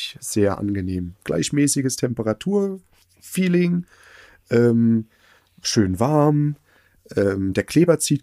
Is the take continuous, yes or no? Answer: yes